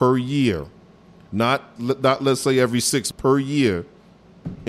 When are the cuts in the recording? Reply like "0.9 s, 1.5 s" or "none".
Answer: 1.8 s, 3.1 s